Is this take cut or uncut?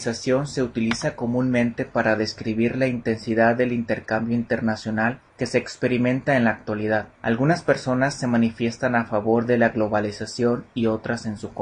cut